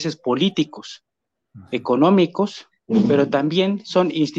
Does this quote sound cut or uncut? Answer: uncut